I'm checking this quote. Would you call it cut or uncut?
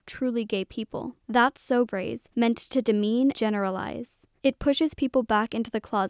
cut